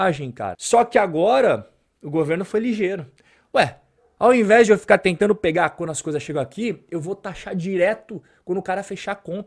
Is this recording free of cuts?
yes; 0 cuts

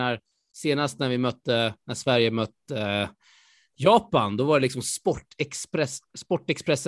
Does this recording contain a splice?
no; 0 cuts

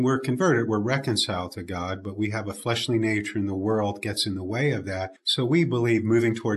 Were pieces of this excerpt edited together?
yes; 1 cut; at 5.2 s

